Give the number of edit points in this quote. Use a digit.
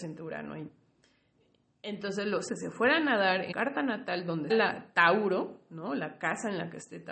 3